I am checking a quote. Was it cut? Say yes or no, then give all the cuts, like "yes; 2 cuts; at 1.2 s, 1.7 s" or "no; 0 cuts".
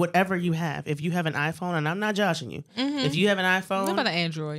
no; 0 cuts